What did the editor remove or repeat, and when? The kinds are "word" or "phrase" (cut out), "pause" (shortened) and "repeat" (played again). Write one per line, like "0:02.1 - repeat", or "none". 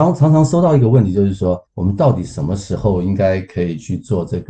0:01.7 - pause